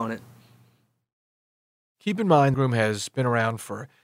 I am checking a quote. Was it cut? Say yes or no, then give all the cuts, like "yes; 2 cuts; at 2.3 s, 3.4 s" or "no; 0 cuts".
yes; 1 cut; at 2.5 s